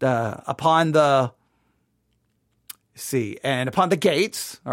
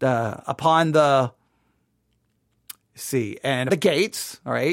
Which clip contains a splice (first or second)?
second